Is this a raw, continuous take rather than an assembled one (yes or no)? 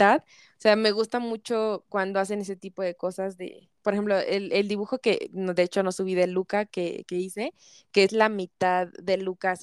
no